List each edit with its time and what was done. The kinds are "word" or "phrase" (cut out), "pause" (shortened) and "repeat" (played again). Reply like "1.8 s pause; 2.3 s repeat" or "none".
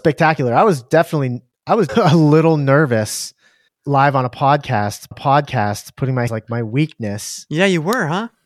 1.9 s word; 3.7 s pause; 5.1 s repeat; 6.3 s word